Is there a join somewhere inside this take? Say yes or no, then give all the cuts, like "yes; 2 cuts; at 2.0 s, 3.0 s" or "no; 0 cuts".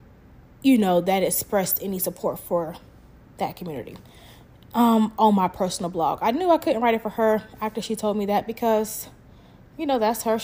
no; 0 cuts